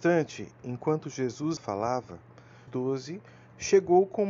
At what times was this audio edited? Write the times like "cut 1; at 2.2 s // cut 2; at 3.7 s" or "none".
cut 1; at 1.6 s // cut 2; at 2.7 s

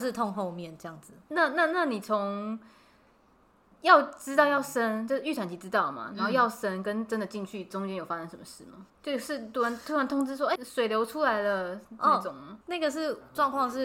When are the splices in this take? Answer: cut 1; at 8.9 s // cut 2; at 10.6 s // cut 3; at 12.6 s

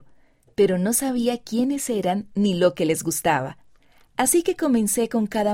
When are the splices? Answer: none

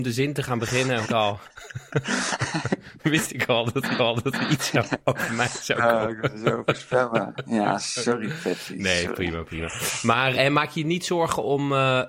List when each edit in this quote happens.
cut 1; at 1.0 s // cut 2; at 4.0 s // cut 3; at 10.3 s

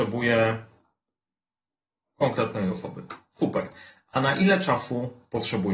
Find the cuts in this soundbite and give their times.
none

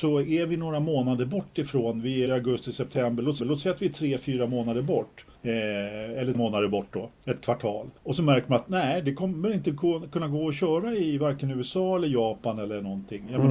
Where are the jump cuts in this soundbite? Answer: cut 1; at 2.2 s // cut 2; at 3.4 s // cut 3; at 5.3 s // cut 4; at 6.3 s // cut 5; at 7.2 s // cut 6; at 8.0 s

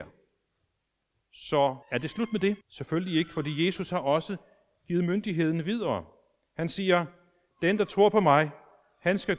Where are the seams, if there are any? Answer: cut 1; at 1.8 s // cut 2; at 2.6 s

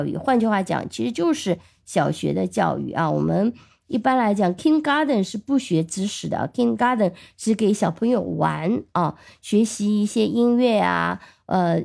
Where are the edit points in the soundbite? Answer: none

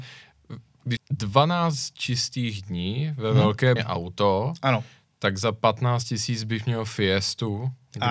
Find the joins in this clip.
cut 1; at 1.0 s // cut 2; at 3.8 s

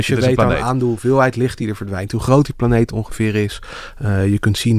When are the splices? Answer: none

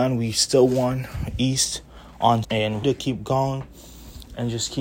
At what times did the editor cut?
cut 1; at 2.4 s // cut 2; at 2.8 s

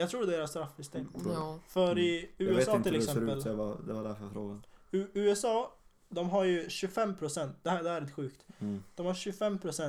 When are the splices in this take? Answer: none

